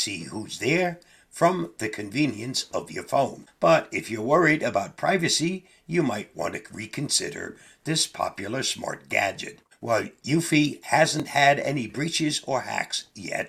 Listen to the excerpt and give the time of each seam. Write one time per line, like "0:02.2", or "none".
none